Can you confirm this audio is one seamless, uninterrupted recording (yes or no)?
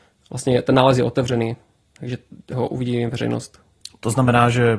yes